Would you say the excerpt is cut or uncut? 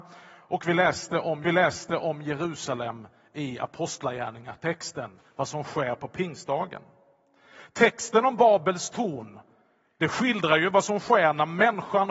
cut